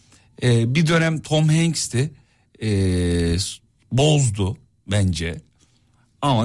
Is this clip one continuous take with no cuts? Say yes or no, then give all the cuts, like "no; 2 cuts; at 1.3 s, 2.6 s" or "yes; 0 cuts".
yes; 0 cuts